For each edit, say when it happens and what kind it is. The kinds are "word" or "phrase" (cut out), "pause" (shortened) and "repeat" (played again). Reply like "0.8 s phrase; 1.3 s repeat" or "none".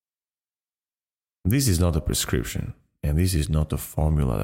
none